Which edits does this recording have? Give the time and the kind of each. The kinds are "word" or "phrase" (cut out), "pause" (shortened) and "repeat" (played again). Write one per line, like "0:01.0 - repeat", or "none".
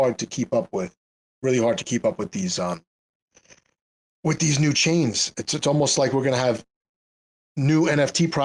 none